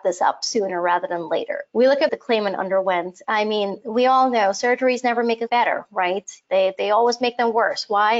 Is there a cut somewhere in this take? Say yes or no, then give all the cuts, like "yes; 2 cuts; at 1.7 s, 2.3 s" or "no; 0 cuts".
yes; 3 cuts; at 1.7 s, 2.1 s, 5.5 s